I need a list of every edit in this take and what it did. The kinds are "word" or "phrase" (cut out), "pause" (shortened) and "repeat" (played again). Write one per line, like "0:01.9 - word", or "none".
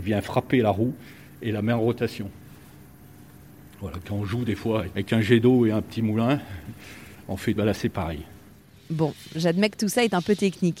0:04.0 - word
0:04.9 - word
0:07.6 - word

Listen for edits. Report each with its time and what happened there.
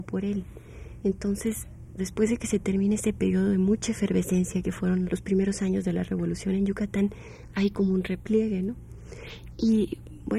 0:02.0 - word
0:05.1 - word

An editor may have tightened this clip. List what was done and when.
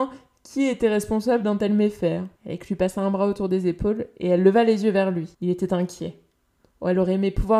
0:02.4 - pause
0:05.3 - pause

